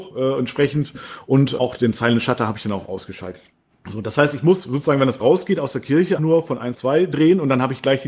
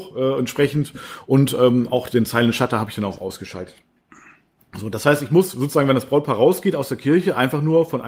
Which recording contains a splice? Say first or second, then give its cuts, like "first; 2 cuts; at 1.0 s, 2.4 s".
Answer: first; 5 cuts; at 1.6 s, 3.6 s, 5.2 s, 6.2 s, 6.7 s